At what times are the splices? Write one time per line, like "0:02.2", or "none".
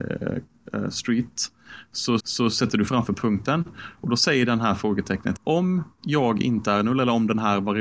0:02.2
0:02.9
0:05.4
0:05.9